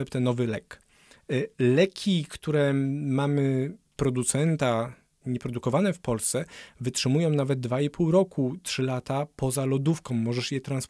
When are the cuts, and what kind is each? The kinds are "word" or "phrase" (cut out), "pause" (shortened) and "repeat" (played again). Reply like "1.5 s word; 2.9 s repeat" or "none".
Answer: 3.9 s pause